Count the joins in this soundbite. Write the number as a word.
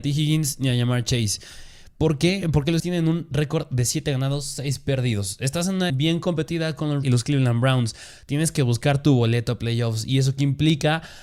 three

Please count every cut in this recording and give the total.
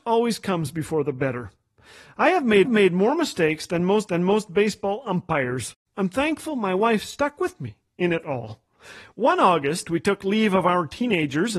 two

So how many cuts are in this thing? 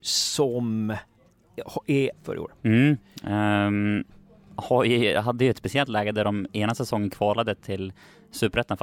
two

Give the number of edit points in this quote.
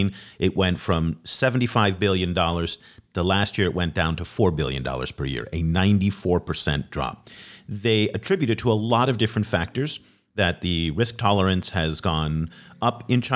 zero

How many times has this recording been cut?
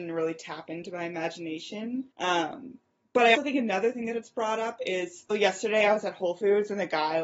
three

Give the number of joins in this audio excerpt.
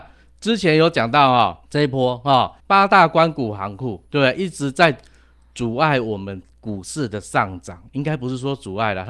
three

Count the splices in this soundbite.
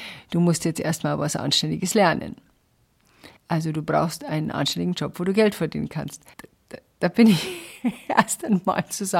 two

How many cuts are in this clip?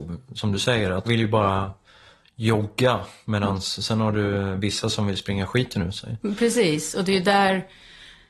one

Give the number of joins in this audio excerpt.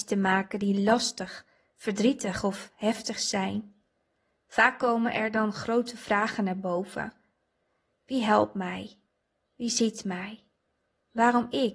zero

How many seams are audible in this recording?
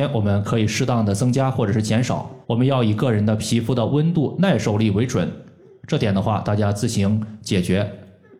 one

